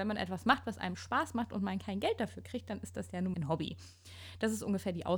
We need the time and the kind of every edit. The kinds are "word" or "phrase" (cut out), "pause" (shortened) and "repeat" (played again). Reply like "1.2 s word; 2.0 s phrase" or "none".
3.3 s word